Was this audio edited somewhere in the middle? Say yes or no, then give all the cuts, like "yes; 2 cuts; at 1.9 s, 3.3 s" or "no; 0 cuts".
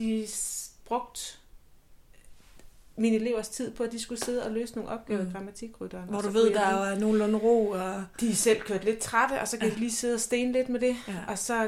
no; 0 cuts